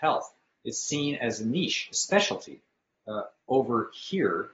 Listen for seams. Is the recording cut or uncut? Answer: uncut